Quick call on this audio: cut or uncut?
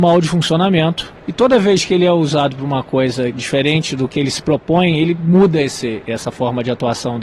uncut